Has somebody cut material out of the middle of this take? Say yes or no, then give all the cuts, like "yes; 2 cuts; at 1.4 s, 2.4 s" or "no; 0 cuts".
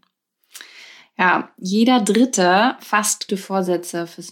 yes; 1 cut; at 3.3 s